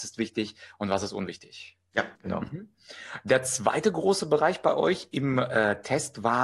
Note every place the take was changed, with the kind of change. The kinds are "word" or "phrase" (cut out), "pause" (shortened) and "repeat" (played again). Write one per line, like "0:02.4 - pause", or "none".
0:02.2 - pause